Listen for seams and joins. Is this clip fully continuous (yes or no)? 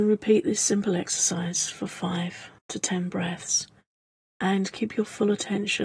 no